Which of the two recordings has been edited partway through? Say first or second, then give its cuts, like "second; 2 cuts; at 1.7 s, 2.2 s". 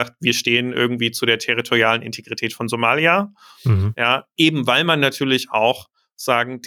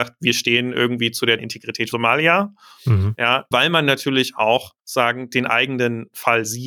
second; 4 cuts; at 1.4 s, 1.9 s, 3.5 s, 4.8 s